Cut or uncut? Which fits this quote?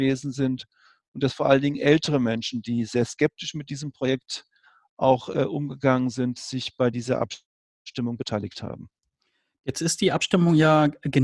uncut